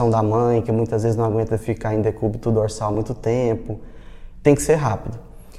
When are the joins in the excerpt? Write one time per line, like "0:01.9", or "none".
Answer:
none